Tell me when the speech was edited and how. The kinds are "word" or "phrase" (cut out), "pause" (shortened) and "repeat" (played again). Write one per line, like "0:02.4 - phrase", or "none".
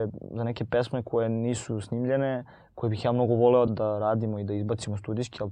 0:03.7 - word